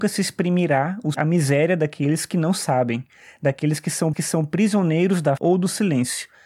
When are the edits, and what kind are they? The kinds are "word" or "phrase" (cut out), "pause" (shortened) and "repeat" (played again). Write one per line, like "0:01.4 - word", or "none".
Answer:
0:01.1 - word
0:04.1 - repeat
0:05.4 - word